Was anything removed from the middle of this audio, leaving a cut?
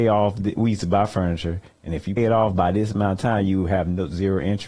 yes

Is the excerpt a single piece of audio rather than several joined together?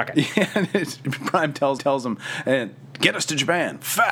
no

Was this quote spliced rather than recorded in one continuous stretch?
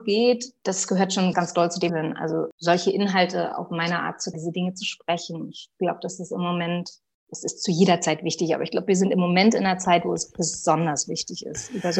yes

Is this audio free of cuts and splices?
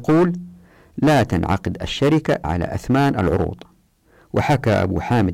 no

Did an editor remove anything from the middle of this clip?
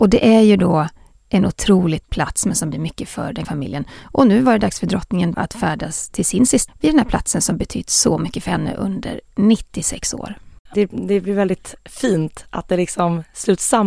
yes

